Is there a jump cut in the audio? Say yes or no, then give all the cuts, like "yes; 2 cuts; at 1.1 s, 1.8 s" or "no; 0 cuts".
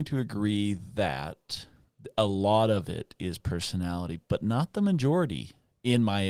no; 0 cuts